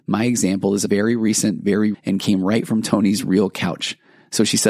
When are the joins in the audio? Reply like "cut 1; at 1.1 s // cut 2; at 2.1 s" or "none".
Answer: cut 1; at 1.9 s